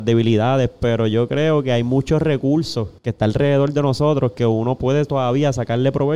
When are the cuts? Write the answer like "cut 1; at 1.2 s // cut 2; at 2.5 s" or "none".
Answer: cut 1; at 3.0 s